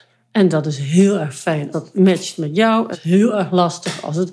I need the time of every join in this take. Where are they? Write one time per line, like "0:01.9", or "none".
0:01.7
0:02.9

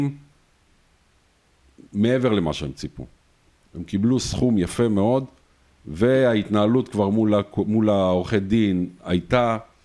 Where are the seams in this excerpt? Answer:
none

